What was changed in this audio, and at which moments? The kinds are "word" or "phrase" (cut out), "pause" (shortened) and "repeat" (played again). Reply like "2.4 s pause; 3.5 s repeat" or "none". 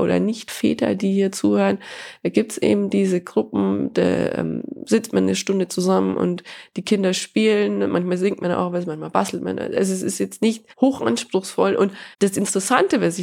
10.7 s pause; 12.1 s pause